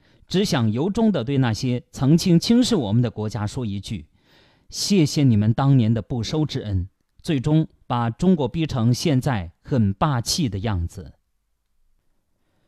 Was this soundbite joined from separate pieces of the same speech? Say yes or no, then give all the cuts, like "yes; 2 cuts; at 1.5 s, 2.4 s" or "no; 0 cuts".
no; 0 cuts